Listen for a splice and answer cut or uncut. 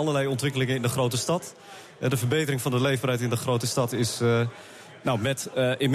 uncut